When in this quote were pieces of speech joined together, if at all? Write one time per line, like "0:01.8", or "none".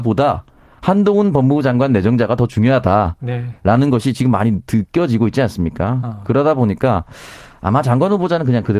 none